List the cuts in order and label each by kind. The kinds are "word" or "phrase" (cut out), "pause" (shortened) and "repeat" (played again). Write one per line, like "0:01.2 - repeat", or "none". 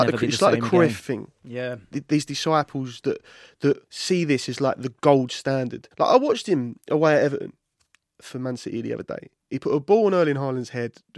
0:03.9 - pause
0:05.9 - pause